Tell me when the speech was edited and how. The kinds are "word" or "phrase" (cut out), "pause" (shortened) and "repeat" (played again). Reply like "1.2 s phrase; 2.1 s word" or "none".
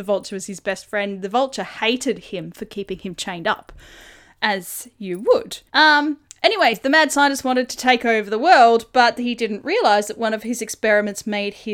5.7 s pause